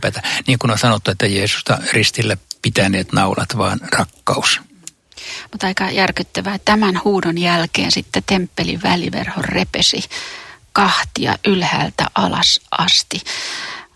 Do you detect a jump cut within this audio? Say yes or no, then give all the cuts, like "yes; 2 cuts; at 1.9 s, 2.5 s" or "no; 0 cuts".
yes; 2 cuts; at 2.6 s, 6.6 s